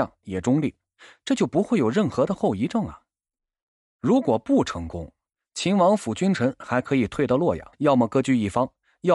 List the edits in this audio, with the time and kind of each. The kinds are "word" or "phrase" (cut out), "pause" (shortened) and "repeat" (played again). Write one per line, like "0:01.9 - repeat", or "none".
0:07.7 - pause